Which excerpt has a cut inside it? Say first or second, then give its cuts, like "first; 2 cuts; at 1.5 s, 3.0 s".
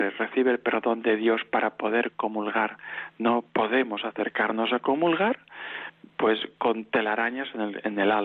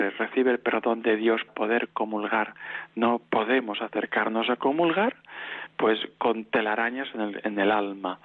second; 2 cuts; at 1.5 s, 5.7 s